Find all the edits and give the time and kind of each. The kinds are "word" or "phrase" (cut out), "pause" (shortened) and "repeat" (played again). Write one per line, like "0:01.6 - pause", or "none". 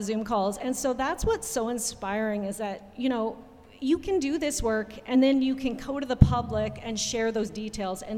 none